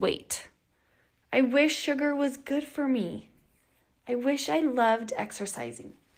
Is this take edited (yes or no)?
no